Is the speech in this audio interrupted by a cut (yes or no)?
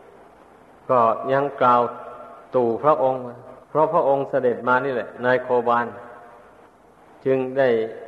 yes